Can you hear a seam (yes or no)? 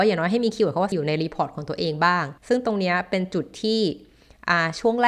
yes